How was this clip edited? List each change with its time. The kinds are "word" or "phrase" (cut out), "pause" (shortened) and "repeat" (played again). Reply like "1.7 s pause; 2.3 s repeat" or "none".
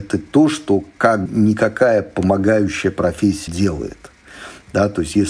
1.3 s word; 3.5 s word

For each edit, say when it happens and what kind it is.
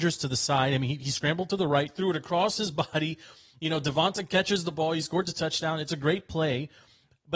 none

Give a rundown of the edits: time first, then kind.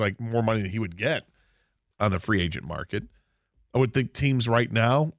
1.9 s word

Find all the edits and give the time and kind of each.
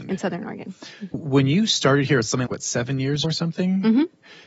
1.1 s word; 2.5 s word; 3.2 s word

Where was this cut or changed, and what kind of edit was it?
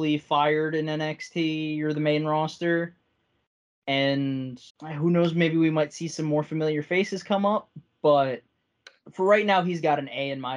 4.7 s pause; 8.9 s pause

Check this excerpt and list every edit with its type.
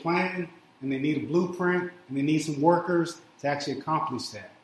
none

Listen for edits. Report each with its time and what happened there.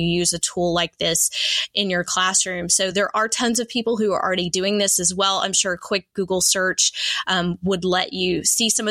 none

